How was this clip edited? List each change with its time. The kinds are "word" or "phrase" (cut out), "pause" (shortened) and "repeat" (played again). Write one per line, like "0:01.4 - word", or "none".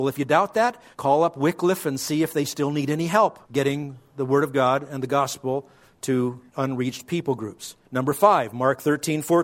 0:00.9 - pause
0:03.4 - pause
0:06.5 - pause
0:07.8 - pause